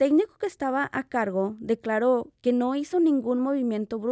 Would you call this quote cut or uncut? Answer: uncut